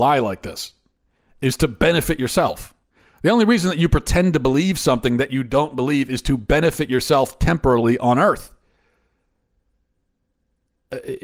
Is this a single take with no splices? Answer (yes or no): yes